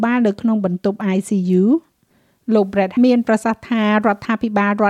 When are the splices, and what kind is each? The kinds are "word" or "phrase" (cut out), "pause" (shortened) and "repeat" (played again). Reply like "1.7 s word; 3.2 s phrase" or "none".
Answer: 3.0 s word